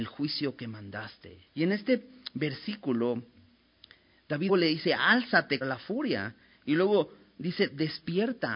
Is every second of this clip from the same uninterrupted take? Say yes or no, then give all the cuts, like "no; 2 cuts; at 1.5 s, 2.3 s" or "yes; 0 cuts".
no; 3 cuts; at 1.5 s, 4.5 s, 5.6 s